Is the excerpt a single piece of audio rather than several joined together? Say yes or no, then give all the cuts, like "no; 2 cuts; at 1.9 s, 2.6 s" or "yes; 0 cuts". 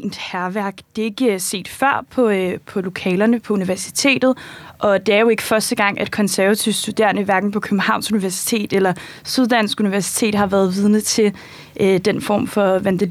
yes; 0 cuts